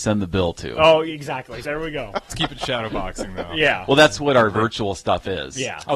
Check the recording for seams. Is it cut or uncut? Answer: cut